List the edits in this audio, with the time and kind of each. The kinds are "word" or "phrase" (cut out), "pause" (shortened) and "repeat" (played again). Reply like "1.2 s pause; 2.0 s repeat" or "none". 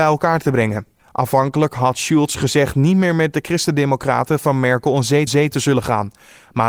1.0 s pause; 5.3 s repeat